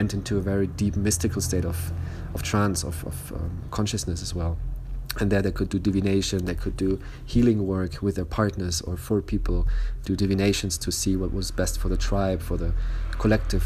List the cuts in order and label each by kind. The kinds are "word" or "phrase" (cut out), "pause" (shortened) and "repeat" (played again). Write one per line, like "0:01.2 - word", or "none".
0:10.0 - phrase